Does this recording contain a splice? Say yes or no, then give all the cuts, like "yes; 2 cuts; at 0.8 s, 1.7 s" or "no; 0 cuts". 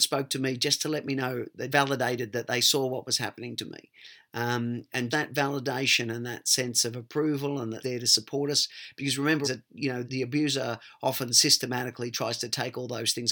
yes; 5 cuts; at 1.7 s, 5.1 s, 7.8 s, 9.4 s, 10.0 s